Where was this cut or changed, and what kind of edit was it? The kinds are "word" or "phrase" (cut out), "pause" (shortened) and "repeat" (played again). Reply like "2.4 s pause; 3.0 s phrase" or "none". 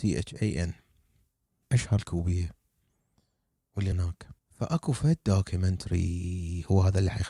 1.6 s phrase; 2.0 s word; 3.9 s word; 4.4 s pause